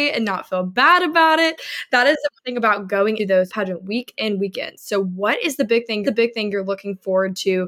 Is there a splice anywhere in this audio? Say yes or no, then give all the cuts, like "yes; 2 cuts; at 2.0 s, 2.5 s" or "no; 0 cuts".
yes; 4 cuts; at 2.4 s, 3.2 s, 3.5 s, 6.0 s